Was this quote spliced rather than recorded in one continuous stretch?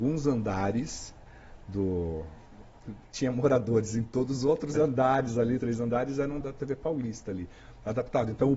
yes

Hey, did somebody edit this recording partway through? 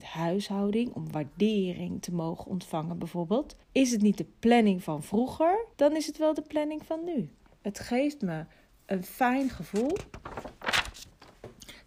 yes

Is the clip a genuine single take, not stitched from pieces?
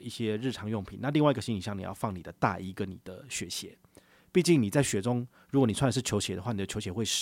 yes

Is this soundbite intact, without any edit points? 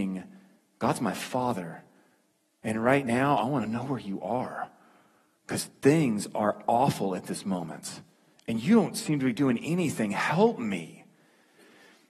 yes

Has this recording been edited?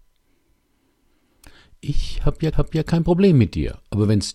yes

